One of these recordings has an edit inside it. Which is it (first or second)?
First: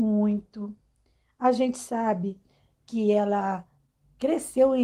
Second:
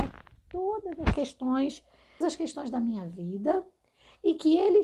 second